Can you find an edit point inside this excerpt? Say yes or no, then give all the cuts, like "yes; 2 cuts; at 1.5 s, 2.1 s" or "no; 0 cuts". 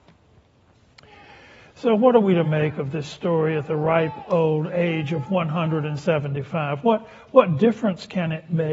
no; 0 cuts